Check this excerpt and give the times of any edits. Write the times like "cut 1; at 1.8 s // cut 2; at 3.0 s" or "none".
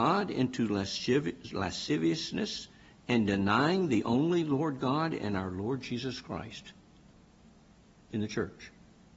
none